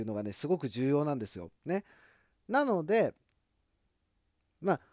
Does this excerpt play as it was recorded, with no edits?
no; 1 cut; at 1.6 s

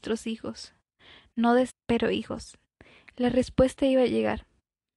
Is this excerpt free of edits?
no; 1 cut; at 1.7 s

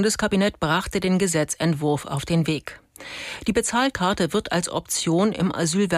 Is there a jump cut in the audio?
no; 0 cuts

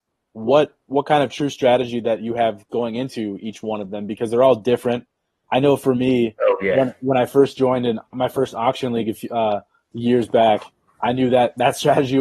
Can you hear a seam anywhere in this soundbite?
yes; 1 cut; at 8.1 s

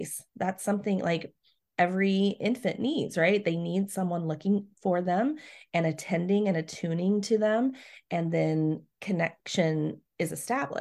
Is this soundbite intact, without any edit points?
yes; 0 cuts

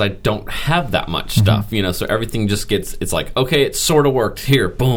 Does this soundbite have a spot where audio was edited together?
no; 0 cuts

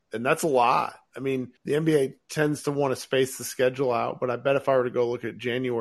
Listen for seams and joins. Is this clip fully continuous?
no; 1 cut; at 1.6 s

